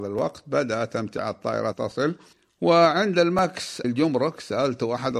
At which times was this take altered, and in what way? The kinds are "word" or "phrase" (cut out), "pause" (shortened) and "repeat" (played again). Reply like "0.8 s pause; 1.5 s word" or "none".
1.7 s word; 2.3 s pause; 3.8 s word